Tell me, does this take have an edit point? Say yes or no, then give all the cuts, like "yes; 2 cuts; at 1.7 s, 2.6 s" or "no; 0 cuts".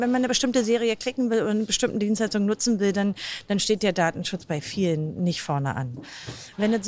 no; 0 cuts